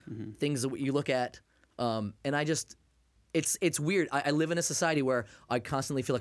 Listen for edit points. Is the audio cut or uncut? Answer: uncut